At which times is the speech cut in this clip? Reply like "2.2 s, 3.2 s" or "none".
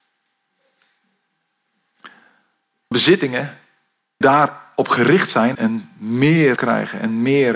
2.9 s, 4.2 s, 5.5 s, 6.6 s